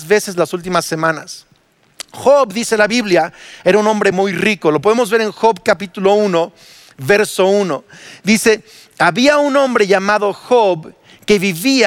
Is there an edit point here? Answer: no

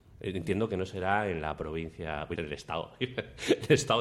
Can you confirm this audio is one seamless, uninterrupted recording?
no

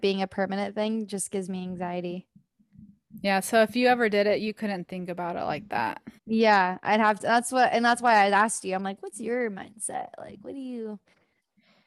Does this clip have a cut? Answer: yes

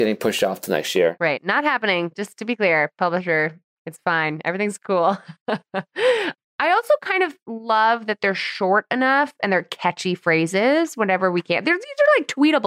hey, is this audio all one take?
yes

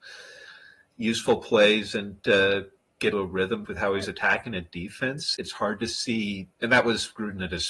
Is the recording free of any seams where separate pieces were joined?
no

